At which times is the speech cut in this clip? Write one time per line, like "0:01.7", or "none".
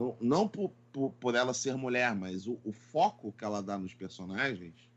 none

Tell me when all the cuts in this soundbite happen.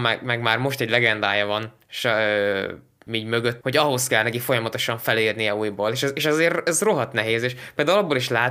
0:03.1
0:03.6

